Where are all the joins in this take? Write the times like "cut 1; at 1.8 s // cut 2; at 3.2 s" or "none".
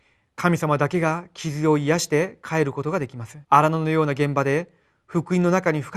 cut 1; at 3.4 s